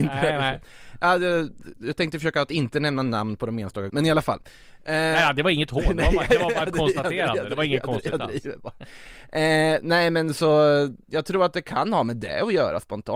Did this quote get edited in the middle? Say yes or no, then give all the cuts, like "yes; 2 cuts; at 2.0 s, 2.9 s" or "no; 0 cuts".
yes; 2 cuts; at 3.9 s, 11.0 s